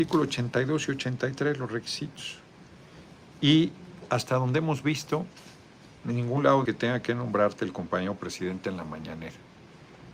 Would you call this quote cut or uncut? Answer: cut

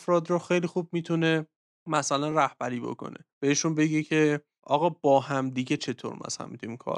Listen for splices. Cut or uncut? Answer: uncut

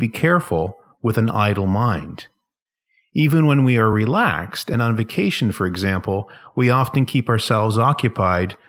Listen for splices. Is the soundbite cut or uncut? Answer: uncut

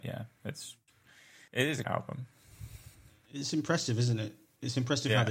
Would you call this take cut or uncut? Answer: cut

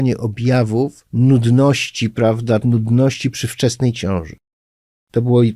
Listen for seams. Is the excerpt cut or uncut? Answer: cut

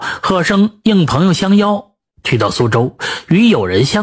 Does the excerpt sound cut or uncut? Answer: uncut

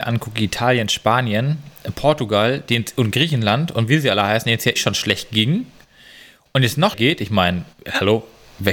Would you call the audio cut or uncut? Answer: cut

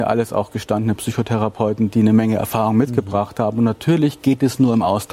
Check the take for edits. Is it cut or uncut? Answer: uncut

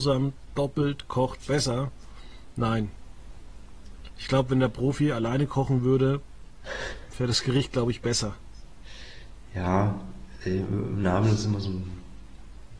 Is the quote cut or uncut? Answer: uncut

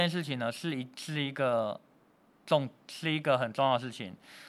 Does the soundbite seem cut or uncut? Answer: uncut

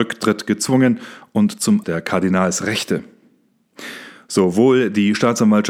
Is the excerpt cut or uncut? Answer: cut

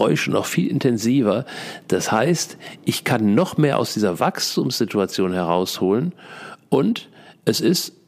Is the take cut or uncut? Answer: uncut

